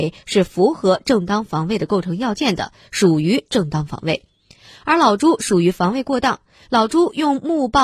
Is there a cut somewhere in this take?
no; 0 cuts

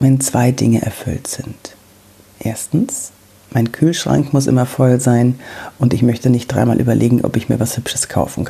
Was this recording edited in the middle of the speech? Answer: no; 0 cuts

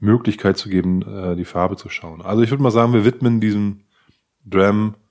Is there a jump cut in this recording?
no; 0 cuts

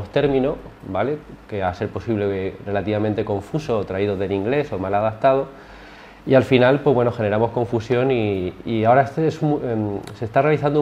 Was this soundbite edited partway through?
no; 0 cuts

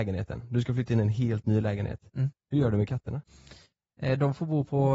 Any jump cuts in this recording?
no; 0 cuts

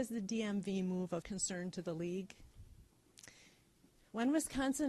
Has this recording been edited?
yes; 1 cut; at 1.2 s

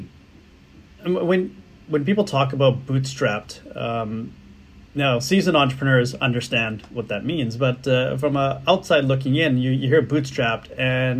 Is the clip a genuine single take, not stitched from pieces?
yes; 0 cuts

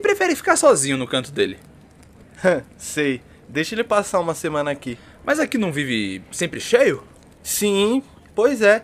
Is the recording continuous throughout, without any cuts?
yes; 0 cuts

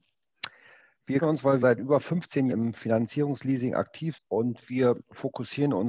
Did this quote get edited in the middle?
yes; 4 cuts; at 1.2 s, 1.6 s, 2.5 s, 4.1 s

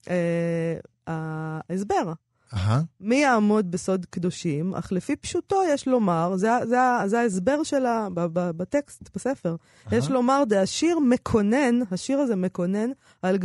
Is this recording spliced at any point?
no; 0 cuts

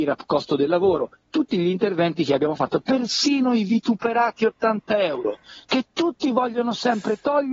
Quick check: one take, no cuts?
yes; 0 cuts

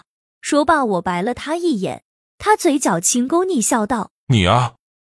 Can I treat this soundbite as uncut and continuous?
yes; 0 cuts

